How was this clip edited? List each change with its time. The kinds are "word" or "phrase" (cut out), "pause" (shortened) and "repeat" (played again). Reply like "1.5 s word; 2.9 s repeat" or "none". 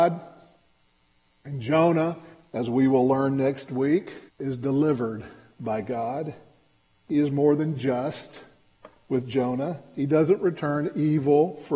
4.3 s pause